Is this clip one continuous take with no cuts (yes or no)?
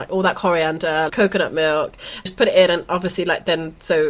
no